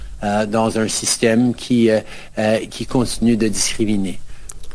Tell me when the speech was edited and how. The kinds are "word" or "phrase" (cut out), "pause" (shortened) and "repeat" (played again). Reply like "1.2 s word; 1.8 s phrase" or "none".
none